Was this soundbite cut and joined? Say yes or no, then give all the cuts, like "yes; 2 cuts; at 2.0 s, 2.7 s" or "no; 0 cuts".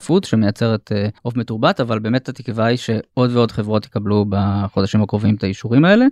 yes; 1 cut; at 1.2 s